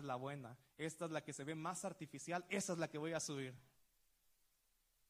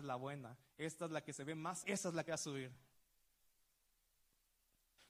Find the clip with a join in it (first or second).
second